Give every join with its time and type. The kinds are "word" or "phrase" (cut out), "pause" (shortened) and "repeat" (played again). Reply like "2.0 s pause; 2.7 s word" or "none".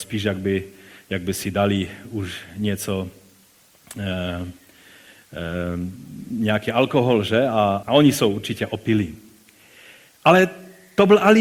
7.8 s word

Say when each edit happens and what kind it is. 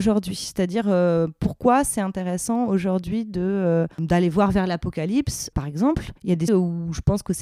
3.9 s pause; 6.2 s pause; 6.5 s word

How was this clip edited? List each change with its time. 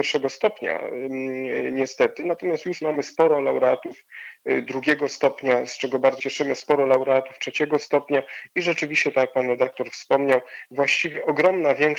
6.2 s word

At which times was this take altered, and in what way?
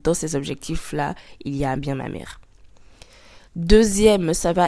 1.8 s word; 3.5 s pause

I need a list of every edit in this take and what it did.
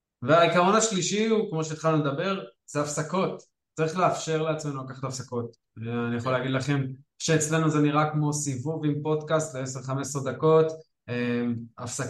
none

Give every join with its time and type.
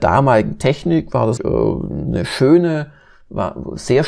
1.4 s word

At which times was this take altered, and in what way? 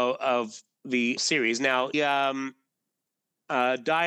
1.2 s word; 1.9 s word

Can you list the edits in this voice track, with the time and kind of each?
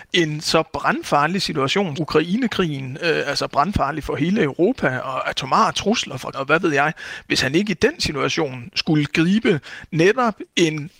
1.9 s word; 6.3 s word

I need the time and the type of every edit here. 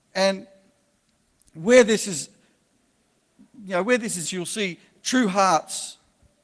4.2 s word

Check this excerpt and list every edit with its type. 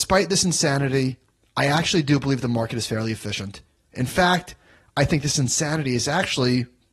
none

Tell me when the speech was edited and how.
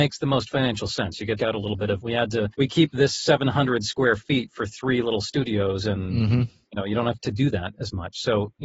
1.4 s phrase; 2.0 s word; 2.5 s pause; 7.2 s word

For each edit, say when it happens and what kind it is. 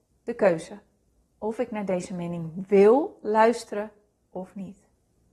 none

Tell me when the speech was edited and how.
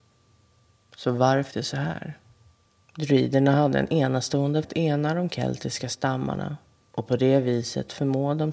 1.5 s word; 2.5 s pause; 4.6 s word

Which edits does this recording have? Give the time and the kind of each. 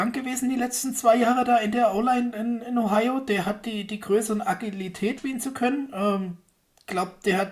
5.2 s phrase

